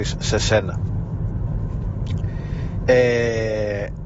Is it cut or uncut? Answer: cut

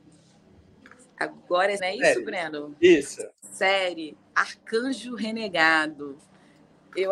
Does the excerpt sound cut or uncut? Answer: cut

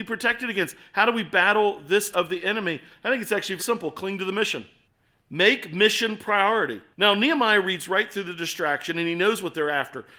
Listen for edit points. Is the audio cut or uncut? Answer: cut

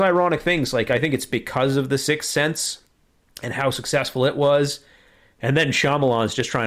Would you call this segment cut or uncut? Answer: uncut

